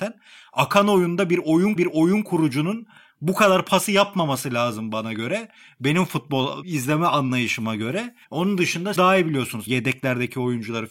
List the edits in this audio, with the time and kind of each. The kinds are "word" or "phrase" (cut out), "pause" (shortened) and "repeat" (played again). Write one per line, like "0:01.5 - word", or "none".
0:01.8 - repeat
0:03.9 - word
0:08.2 - pause
0:09.0 - word
0:09.7 - word